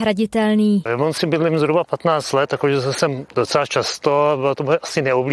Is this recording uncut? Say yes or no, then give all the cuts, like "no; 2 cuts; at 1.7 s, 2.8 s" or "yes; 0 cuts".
yes; 0 cuts